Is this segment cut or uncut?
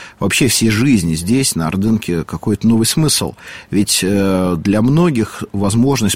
uncut